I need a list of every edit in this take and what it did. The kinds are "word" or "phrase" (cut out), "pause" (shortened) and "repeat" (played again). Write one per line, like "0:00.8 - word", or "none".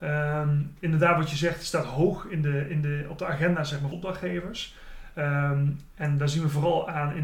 0:03.9 - word

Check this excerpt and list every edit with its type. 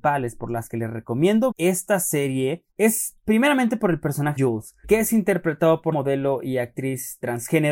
0:01.5 - word
0:02.7 - pause
0:04.4 - word
0:04.8 - word
0:05.9 - word

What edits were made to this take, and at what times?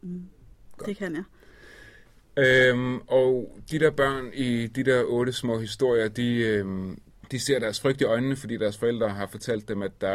none

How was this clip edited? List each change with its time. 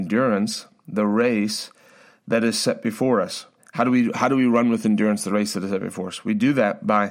0:03.6 - pause

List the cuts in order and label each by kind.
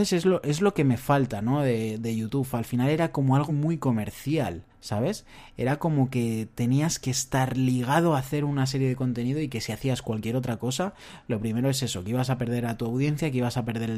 0:03.5 - word
0:04.7 - pause

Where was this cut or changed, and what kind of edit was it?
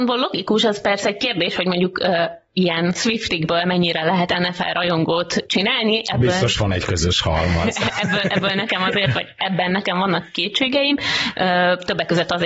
none

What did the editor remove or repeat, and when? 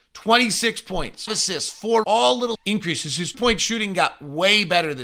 0:01.3 - word
0:02.0 - word
0:02.5 - word
0:03.3 - word

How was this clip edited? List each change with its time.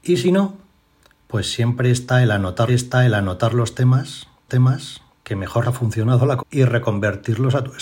0:02.7 - repeat
0:04.5 - repeat
0:05.6 - word
0:06.4 - word

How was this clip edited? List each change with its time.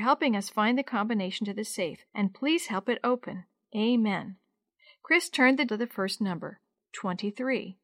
0:02.1 - pause
0:05.7 - word

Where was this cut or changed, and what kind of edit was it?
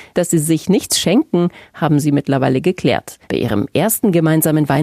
0:03.2 - pause

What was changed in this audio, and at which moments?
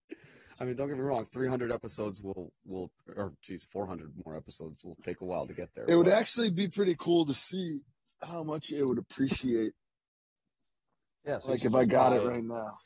none

